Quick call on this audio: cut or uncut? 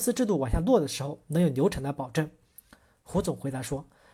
uncut